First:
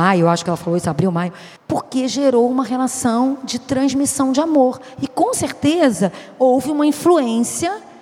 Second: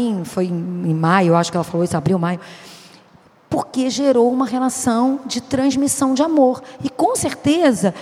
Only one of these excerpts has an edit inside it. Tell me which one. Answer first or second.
first